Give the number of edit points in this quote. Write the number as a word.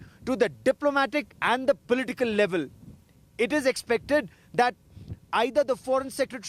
one